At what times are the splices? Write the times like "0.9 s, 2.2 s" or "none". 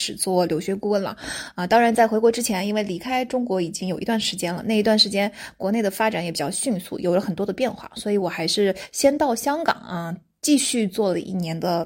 none